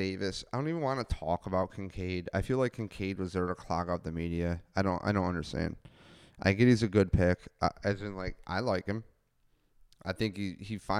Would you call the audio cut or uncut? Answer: uncut